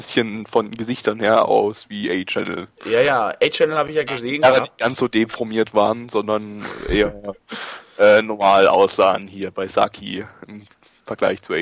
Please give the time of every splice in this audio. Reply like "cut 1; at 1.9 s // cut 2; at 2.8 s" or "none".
none